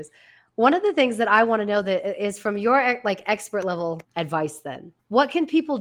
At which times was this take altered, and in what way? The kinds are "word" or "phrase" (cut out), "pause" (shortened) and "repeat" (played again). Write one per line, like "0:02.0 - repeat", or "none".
0:04.0 - pause

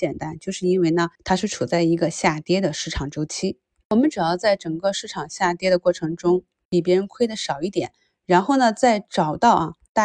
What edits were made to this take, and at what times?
0:01.1 - pause

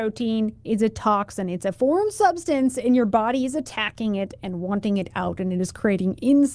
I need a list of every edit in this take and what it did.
none

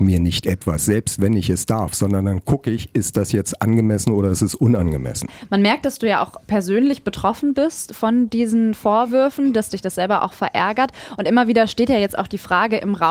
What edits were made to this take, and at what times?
none

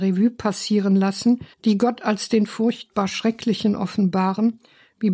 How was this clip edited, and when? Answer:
0:01.5 - pause

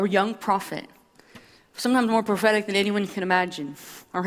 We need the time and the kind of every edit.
none

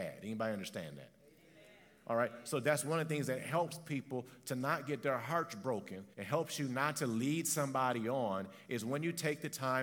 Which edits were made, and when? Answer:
0:06.1 - pause

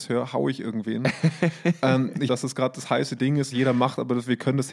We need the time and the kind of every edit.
0:02.3 - phrase
0:03.5 - phrase

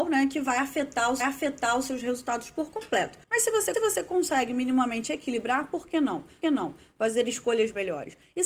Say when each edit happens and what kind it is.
0:01.2 - repeat
0:03.2 - pause
0:03.7 - repeat
0:06.4 - repeat

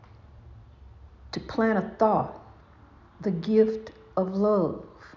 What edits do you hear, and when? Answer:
0:03.0 - pause

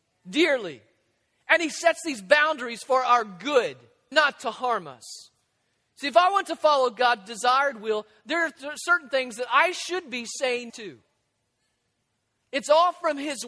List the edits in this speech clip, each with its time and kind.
0:04.1 - word
0:10.7 - word

